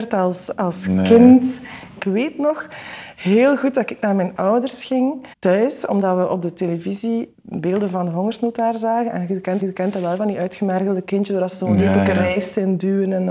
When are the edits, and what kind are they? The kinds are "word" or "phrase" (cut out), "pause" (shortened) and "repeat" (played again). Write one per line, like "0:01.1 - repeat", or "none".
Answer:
0:05.3 - pause
0:07.3 - word
0:09.6 - repeat

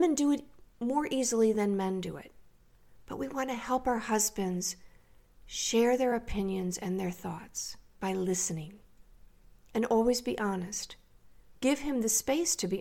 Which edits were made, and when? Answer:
none

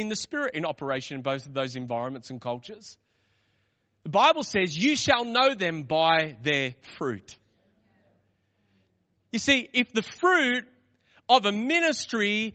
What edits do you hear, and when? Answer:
none

